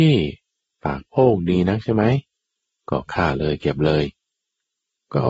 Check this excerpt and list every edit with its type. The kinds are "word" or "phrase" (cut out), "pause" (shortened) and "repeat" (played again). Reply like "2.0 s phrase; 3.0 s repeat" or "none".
none